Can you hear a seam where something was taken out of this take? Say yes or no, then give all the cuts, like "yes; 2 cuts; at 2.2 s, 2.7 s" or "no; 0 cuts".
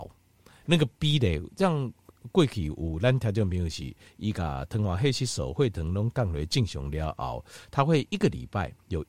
no; 0 cuts